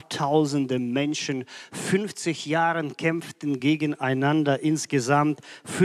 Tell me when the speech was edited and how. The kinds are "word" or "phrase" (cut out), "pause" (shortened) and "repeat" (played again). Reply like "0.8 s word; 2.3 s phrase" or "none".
none